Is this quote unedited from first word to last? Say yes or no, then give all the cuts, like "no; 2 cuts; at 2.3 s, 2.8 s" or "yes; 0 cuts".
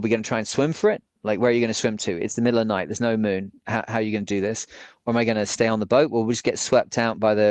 yes; 0 cuts